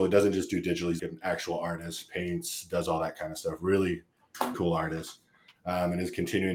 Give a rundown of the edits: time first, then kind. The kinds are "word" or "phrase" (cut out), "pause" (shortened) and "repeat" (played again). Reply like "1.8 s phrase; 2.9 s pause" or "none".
1.0 s word; 4.5 s word